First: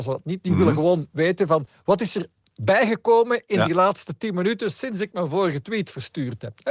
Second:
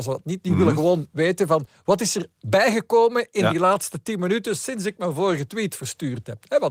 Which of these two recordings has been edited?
second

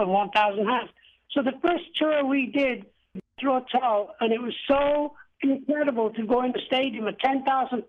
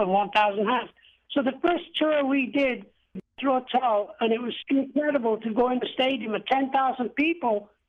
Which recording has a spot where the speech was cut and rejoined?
second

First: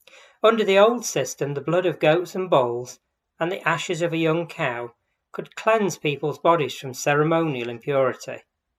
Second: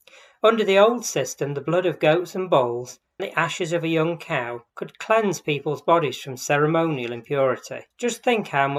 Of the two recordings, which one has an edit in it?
second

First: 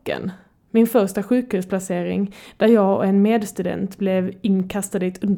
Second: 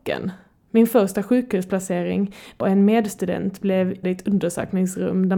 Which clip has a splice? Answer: second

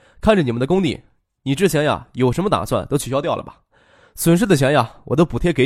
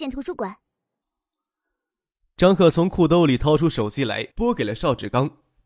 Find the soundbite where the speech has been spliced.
second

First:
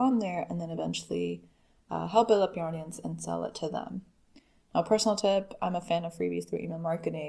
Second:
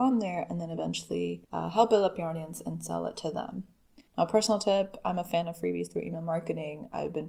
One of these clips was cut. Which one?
second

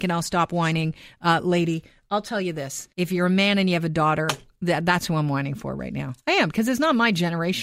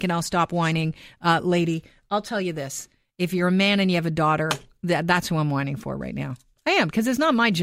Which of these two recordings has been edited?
first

